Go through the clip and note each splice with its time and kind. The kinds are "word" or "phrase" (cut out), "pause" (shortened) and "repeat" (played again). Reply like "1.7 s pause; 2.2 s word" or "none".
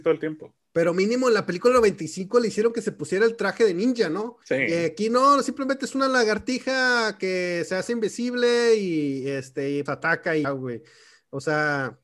4.4 s pause; 9.9 s word; 10.4 s word